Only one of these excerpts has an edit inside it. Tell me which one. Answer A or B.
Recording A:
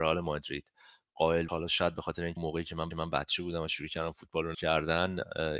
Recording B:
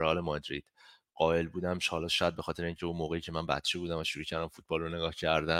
A